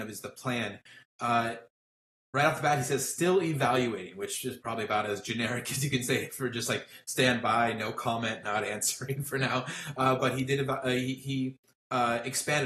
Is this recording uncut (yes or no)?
yes